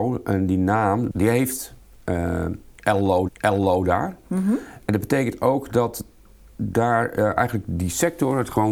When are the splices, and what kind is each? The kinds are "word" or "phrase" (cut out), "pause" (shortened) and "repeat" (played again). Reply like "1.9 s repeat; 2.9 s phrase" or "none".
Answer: 3.3 s repeat

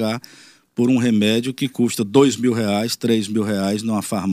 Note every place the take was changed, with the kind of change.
none

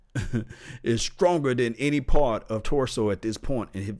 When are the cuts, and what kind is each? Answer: 2.6 s phrase

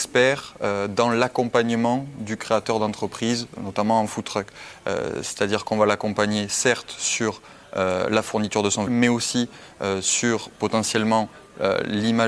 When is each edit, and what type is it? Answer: 3.6 s word; 8.9 s word

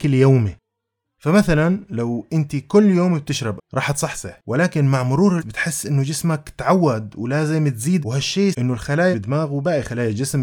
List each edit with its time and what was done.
3.6 s word; 5.4 s word; 8.0 s word; 8.5 s word; 9.1 s word

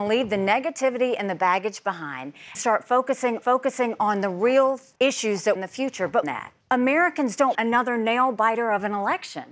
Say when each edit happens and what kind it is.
2.5 s word; 3.4 s repeat; 5.0 s pause; 5.6 s phrase; 6.2 s phrase; 6.6 s pause; 7.5 s word

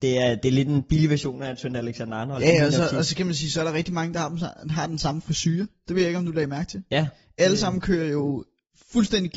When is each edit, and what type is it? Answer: none

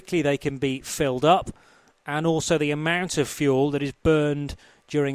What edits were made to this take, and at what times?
none

